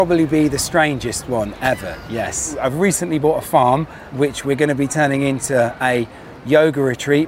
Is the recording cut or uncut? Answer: cut